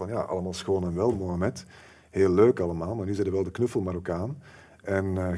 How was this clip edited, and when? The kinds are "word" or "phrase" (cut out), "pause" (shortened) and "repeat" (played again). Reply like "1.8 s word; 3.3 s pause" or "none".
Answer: none